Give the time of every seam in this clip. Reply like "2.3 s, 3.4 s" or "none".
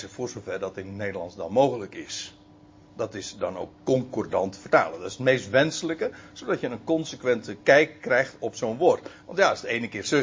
none